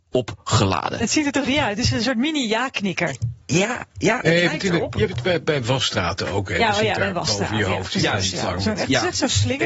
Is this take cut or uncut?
uncut